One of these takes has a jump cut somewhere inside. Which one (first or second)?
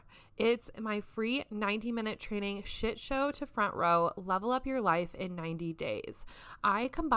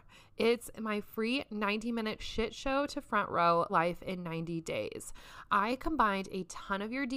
second